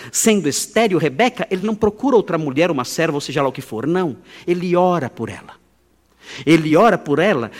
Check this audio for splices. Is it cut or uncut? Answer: uncut